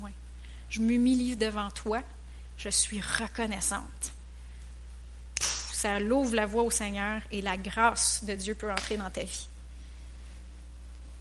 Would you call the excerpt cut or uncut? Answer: uncut